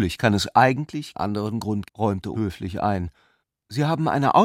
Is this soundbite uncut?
no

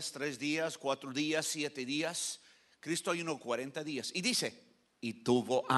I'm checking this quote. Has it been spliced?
no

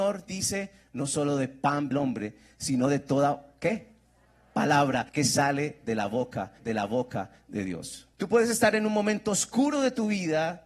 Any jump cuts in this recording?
yes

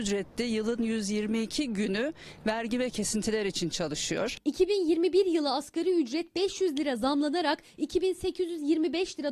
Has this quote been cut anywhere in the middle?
no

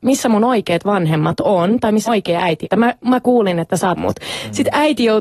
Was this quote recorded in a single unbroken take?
no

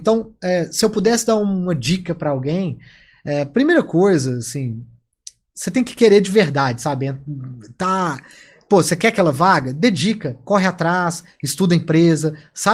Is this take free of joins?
yes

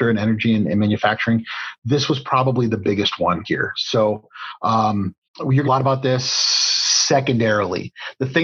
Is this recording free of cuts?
no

